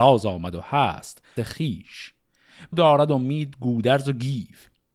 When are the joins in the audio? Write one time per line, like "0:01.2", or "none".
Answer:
0:01.4
0:02.7

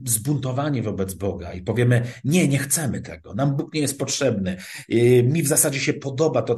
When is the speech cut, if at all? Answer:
none

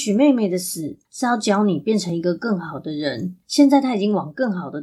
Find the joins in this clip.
0:01.0
0:03.4

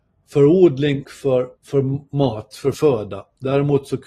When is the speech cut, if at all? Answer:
0:01.0
0:01.6
0:02.7

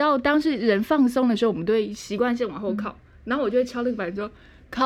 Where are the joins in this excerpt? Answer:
none

